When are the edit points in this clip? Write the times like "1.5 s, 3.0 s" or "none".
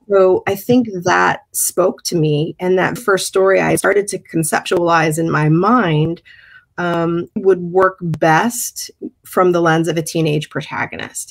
3.0 s, 7.4 s

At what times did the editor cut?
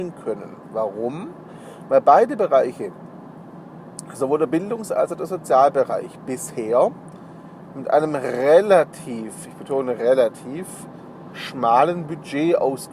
none

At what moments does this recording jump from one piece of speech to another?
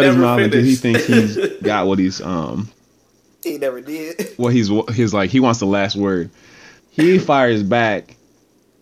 6.8 s

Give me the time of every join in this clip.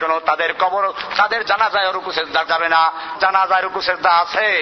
2.5 s, 3.2 s

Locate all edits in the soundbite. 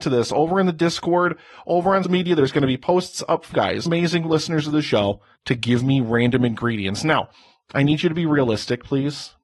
2.0 s, 3.5 s, 3.9 s, 5.4 s

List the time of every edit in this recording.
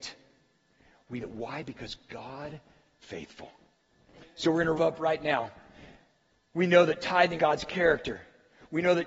1.2 s, 3.0 s, 4.8 s, 7.4 s

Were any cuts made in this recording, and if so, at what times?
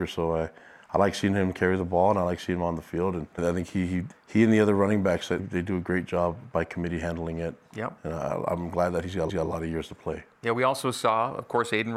3.4 s, 4.1 s, 5.4 s, 9.3 s

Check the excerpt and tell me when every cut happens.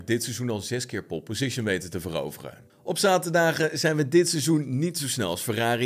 2.7 s

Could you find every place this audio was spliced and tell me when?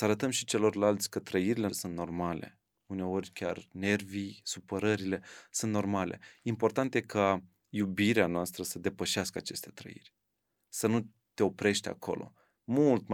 1.7 s

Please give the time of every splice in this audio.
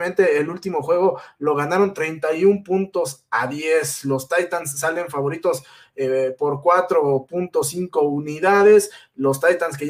none

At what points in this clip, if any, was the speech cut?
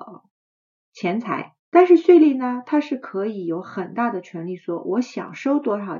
1.6 s

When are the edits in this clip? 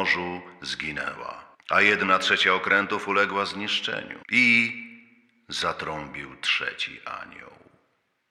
1.5 s, 4.2 s

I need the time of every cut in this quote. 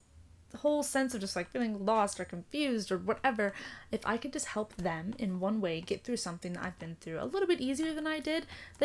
none

